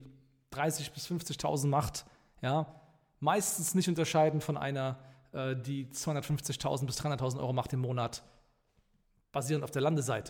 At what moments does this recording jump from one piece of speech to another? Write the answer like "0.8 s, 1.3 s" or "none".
none